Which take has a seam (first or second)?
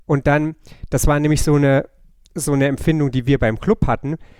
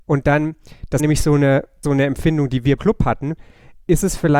second